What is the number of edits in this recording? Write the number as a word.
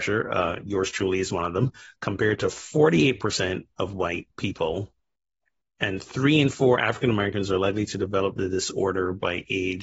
zero